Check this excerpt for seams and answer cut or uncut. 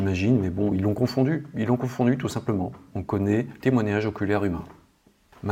cut